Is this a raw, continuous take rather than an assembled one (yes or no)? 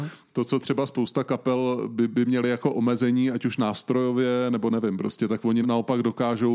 no